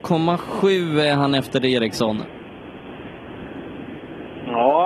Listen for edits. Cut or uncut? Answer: uncut